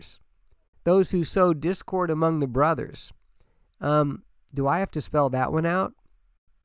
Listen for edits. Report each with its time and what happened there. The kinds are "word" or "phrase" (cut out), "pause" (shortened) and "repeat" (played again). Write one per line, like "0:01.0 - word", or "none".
none